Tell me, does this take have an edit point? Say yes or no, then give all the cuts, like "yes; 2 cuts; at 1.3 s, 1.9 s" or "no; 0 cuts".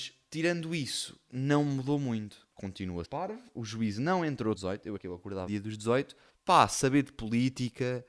yes; 6 cuts; at 2.5 s, 3.0 s, 4.6 s, 5.0 s, 5.5 s, 6.3 s